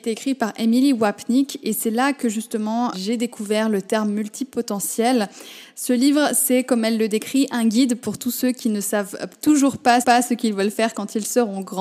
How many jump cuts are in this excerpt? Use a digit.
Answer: 2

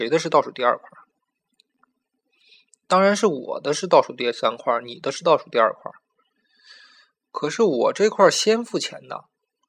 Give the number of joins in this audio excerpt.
0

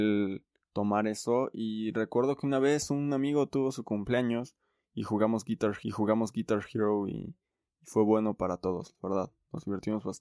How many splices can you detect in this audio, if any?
1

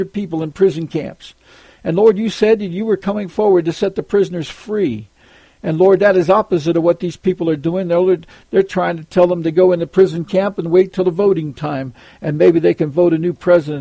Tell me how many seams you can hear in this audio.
0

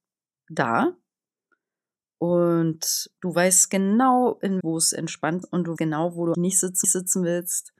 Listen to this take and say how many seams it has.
6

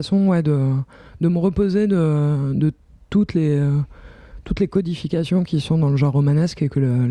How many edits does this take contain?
0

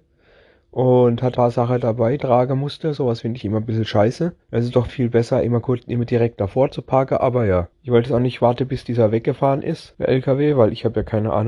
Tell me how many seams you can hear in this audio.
7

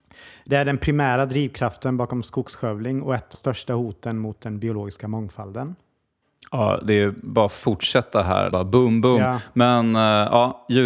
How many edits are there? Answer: 2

